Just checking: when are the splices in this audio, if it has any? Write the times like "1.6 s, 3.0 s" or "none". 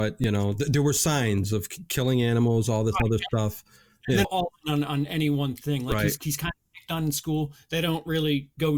4.2 s